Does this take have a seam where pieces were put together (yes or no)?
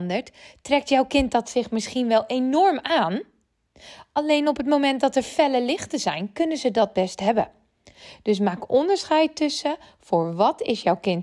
no